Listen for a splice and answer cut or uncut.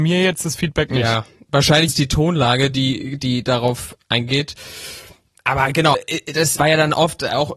cut